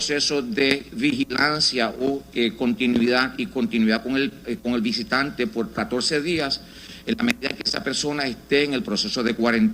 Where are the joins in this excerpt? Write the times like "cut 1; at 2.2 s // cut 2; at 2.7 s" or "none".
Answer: none